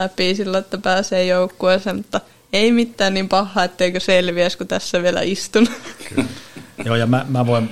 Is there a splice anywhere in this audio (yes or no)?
no